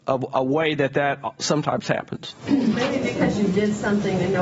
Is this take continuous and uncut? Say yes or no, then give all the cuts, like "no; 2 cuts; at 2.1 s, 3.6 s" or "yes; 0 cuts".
yes; 0 cuts